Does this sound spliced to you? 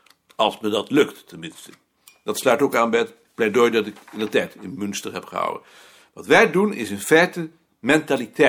no; 0 cuts

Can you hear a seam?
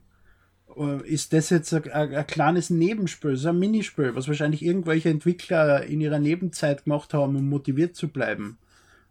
no; 0 cuts

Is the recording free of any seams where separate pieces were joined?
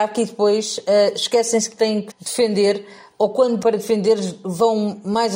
no; 2 cuts; at 2.1 s, 3.6 s

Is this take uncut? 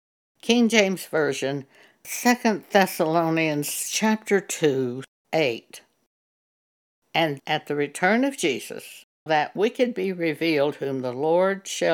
no; 3 cuts; at 5.2 s, 7.4 s, 9.3 s

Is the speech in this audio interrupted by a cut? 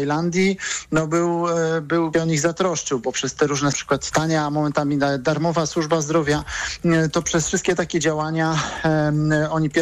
yes; 3 cuts; at 2.1 s, 3.7 s, 4.1 s

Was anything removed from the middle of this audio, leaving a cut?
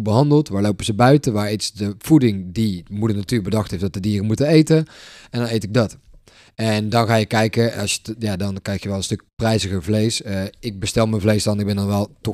no; 0 cuts

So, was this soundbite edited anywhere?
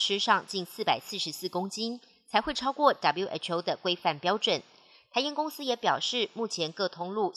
no; 0 cuts

